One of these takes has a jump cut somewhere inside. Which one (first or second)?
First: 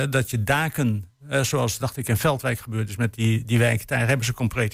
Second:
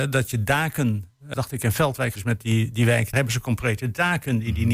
second